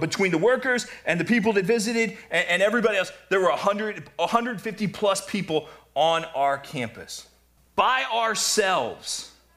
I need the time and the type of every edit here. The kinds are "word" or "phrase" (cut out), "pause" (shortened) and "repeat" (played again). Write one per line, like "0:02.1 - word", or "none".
0:07.6 - pause